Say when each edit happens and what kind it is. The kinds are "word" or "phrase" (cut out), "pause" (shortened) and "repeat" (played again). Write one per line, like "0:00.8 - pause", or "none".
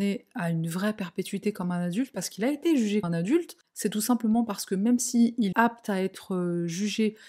0:03.0 - word
0:05.5 - word